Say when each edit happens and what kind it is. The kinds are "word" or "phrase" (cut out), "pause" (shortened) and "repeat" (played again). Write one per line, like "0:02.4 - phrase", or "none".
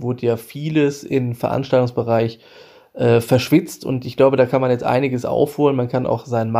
none